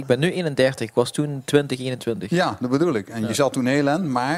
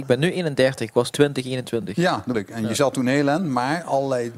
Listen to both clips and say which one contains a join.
second; 2 cuts; at 1.1 s, 2.3 s

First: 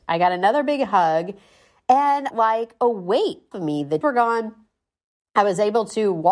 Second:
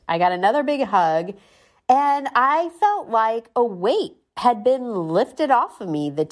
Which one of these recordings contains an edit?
first; 3 cuts; at 2.3 s, 3.5 s, 4.0 s

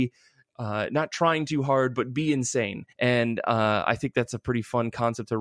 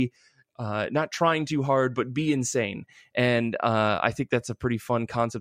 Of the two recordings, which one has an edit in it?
first; 1 cut; at 2.9 s

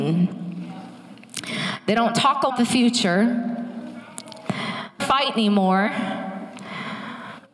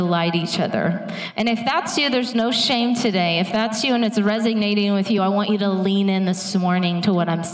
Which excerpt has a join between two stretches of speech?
first; 2 cuts; at 2.5 s, 5.0 s

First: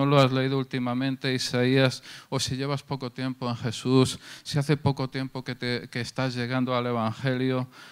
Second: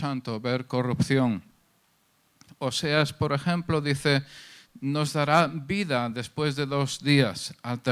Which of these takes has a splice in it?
first; 1 cut; at 5.9 s

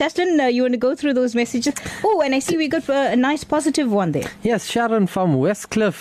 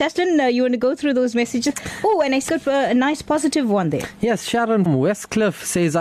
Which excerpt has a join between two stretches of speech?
second; 2 cuts; at 2.5 s, 4.9 s

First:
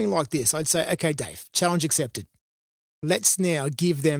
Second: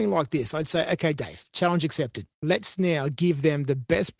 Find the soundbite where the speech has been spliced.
second; 1 cut; at 2.3 s

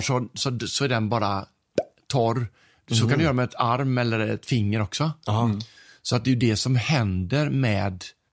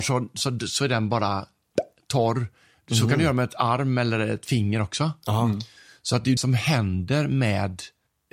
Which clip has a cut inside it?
second; 1 cut; at 6.4 s

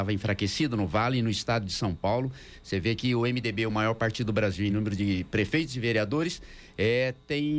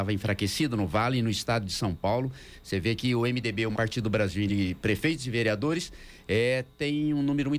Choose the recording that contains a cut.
second; 2 cuts; at 3.7 s, 4.5 s

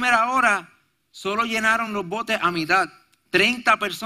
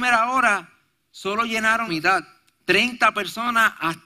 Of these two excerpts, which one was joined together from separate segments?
second; 1 cut; at 1.9 s

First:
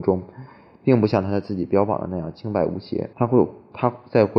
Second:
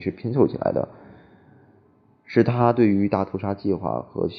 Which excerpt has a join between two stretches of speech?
first; 1 cut; at 3.1 s

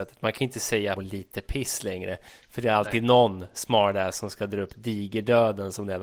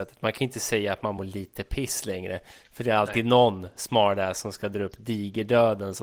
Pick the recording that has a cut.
first; 1 cut; at 0.9 s

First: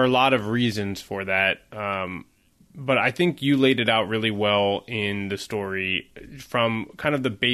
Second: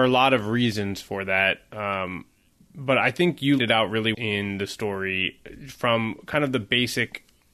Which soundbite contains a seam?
second; 2 cuts; at 3.6 s, 4.1 s

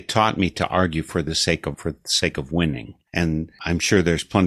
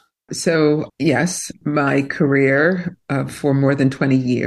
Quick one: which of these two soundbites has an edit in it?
first; 1 cut; at 1.7 s

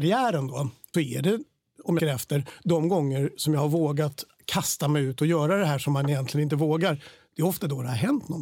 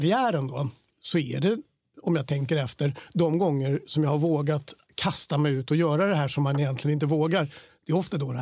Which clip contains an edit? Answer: first; 2 cuts; at 0.9 s, 2.0 s

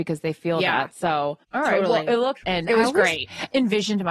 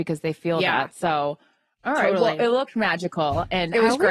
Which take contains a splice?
first; 2 cuts; at 1.4 s, 2.4 s

